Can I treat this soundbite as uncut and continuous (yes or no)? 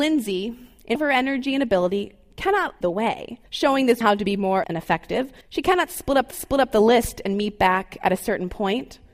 no